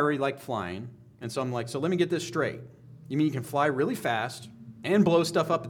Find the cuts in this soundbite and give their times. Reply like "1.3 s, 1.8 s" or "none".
none